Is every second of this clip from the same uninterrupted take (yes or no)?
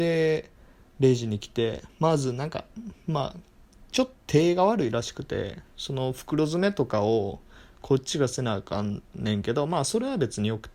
no